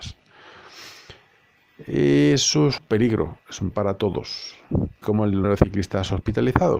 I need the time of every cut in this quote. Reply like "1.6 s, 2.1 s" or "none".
2.8 s, 3.7 s, 5.0 s, 5.4 s